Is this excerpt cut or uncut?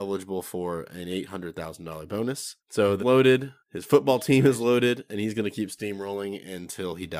cut